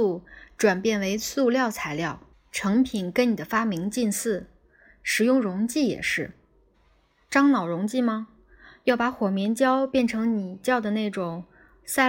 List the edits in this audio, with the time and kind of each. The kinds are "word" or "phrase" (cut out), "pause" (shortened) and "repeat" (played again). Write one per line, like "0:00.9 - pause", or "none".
0:02.3 - pause